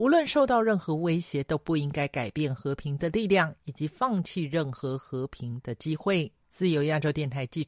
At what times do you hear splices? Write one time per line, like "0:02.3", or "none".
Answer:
0:06.4